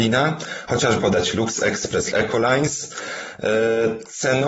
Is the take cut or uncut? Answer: cut